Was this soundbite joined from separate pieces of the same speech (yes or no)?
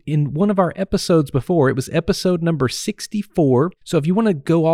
yes